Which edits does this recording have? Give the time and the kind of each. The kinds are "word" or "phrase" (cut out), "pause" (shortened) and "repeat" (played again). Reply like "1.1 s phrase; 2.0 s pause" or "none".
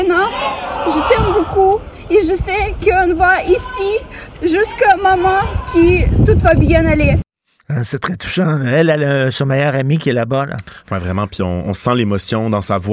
none